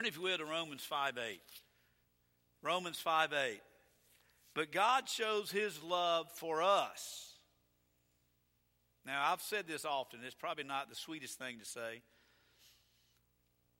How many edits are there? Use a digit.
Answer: 0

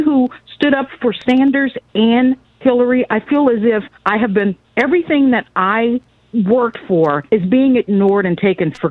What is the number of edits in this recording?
4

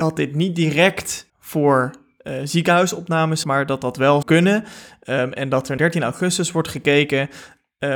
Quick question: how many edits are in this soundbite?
4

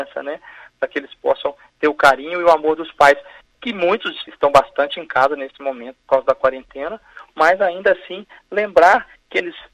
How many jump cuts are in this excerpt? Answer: 0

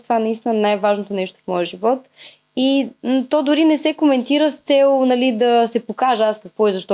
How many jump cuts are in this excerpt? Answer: 0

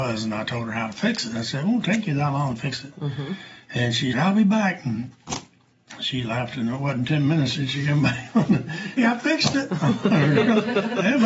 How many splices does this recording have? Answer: 2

